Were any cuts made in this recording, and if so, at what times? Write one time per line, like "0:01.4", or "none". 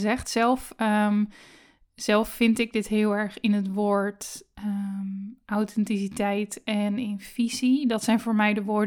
none